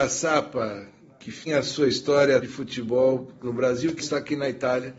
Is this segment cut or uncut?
cut